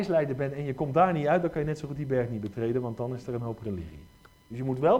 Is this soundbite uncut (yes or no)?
yes